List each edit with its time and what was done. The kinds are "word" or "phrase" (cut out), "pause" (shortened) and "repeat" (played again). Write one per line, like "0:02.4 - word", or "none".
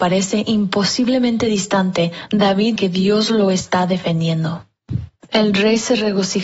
0:02.8 - word